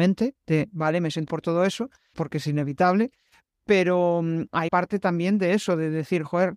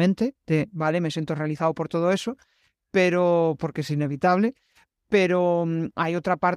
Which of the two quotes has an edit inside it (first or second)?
first